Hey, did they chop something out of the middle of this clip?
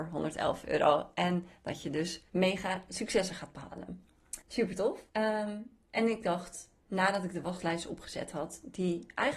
yes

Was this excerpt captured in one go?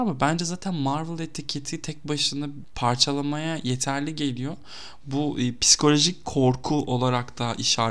yes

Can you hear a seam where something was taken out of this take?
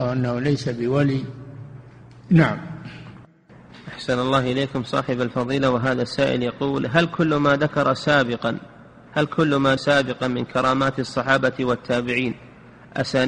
yes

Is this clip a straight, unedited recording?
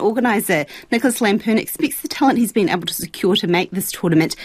yes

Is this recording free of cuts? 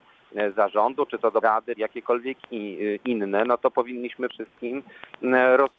no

